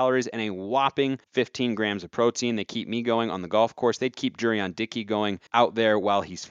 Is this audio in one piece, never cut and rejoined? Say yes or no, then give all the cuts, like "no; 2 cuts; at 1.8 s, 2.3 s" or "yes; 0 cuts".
no; 2 cuts; at 1.2 s, 5.5 s